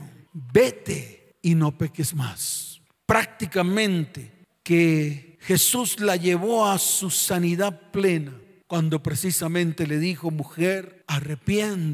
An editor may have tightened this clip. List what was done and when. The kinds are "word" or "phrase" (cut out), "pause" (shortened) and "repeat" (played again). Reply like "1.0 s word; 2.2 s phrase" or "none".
none